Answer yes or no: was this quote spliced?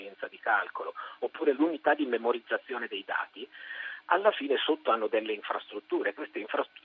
no